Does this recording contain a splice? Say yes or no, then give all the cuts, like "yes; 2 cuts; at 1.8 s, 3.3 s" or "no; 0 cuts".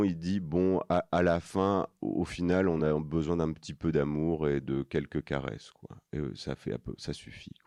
no; 0 cuts